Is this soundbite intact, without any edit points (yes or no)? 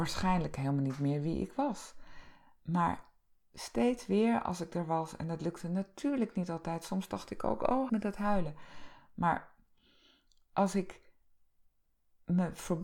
no